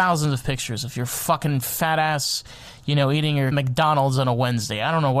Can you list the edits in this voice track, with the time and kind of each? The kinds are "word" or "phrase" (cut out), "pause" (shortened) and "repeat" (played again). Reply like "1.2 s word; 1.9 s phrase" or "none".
3.5 s word